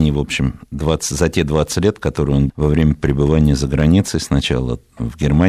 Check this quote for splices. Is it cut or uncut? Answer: cut